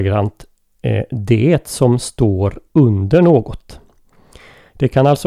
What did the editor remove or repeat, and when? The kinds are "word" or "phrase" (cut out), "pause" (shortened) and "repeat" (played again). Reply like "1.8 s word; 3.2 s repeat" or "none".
none